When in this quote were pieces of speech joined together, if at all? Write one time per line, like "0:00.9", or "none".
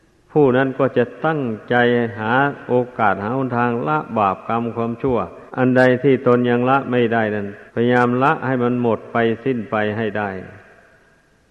0:05.5
0:07.7